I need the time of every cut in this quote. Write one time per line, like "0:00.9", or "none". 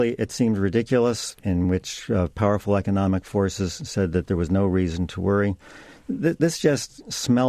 none